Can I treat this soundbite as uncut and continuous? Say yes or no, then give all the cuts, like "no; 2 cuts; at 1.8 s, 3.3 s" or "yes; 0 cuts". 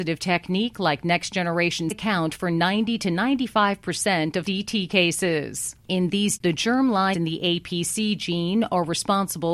no; 5 cuts; at 1.9 s, 4.4 s, 5.8 s, 6.4 s, 7.1 s